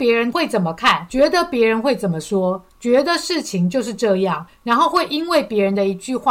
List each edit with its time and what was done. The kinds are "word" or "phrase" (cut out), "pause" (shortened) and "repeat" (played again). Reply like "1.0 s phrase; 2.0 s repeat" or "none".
2.7 s pause; 4.5 s pause